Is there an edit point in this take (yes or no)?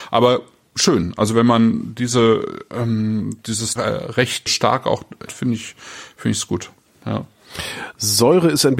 yes